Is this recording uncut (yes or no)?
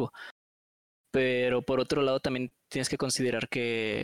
yes